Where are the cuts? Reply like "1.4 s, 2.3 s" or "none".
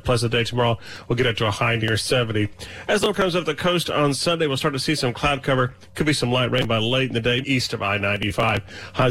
3.1 s, 7.4 s